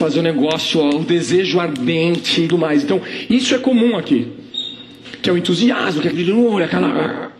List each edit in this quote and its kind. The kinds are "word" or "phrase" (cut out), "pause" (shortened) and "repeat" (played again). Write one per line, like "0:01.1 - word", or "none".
0:02.5 - word
0:06.1 - word